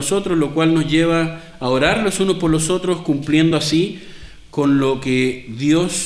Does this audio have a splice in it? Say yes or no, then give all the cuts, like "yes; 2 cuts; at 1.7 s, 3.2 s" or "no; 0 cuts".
no; 0 cuts